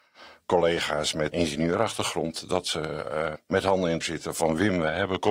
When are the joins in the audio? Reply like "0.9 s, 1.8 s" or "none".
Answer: 1.3 s, 3.3 s, 4.0 s

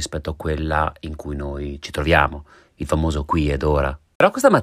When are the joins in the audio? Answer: none

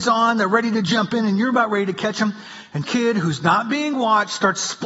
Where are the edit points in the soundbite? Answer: 2.8 s

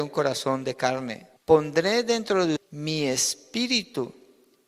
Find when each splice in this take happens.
1.4 s, 2.6 s

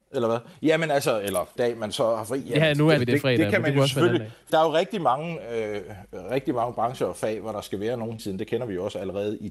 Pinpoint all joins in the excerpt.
1.6 s, 3.0 s, 4.5 s, 8.2 s

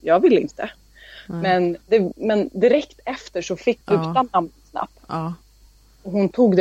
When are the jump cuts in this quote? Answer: 1.8 s, 3.8 s

